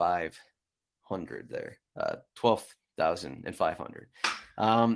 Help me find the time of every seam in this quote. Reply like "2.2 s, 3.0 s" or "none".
1.9 s